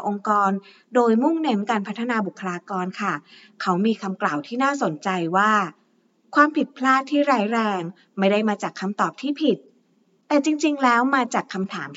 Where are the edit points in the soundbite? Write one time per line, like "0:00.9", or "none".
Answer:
none